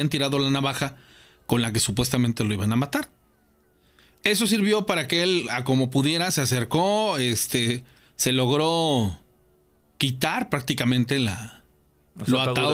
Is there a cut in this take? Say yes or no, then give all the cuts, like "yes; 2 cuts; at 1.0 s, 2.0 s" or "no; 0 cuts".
no; 0 cuts